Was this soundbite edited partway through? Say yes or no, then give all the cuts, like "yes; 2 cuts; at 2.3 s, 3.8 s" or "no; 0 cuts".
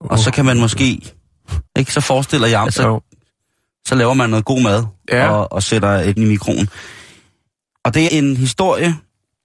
yes; 4 cuts; at 1.7 s, 2.7 s, 6.2 s, 8.1 s